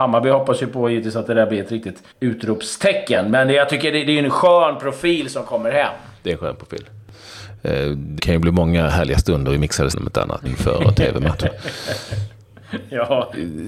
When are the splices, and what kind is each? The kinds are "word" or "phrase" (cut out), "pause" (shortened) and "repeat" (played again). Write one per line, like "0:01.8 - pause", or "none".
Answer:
0:02.1 - pause
0:08.2 - word
0:09.9 - word
0:10.5 - word